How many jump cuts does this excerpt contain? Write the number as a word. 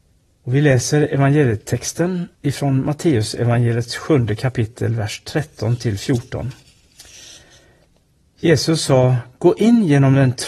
one